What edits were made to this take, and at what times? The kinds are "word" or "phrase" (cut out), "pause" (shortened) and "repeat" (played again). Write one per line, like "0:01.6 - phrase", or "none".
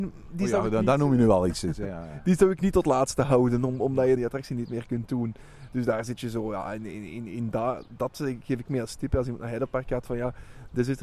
0:04.2 - phrase
0:08.7 - word